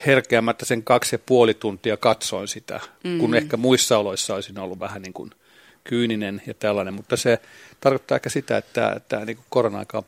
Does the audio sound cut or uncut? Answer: uncut